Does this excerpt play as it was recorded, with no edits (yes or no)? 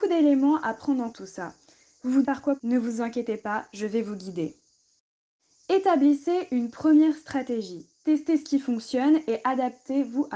no